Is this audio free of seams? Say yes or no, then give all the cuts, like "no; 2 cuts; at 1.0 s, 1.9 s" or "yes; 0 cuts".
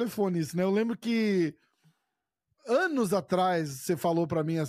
yes; 0 cuts